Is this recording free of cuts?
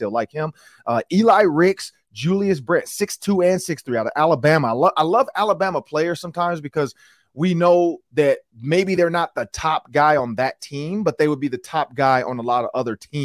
yes; 0 cuts

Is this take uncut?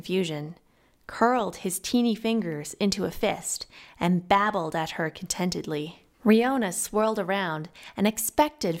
no; 1 cut; at 6.1 s

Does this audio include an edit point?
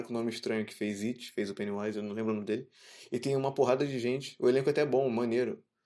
no; 0 cuts

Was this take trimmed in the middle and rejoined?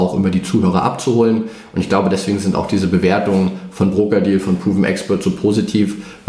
no; 0 cuts

